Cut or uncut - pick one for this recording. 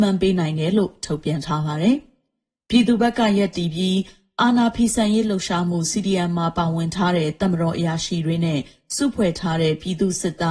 uncut